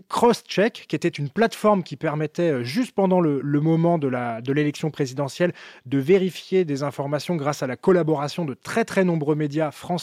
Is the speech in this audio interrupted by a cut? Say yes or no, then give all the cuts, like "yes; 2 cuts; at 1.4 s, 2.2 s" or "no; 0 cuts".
no; 0 cuts